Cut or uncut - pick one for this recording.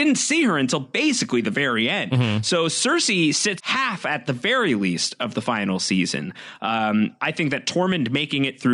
cut